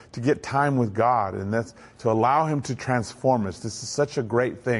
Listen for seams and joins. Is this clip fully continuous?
yes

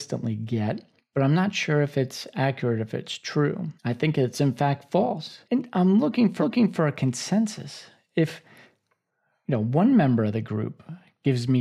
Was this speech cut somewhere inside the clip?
yes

